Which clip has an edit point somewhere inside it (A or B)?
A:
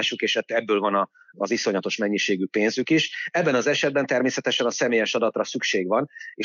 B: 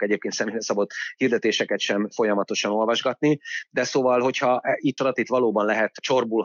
B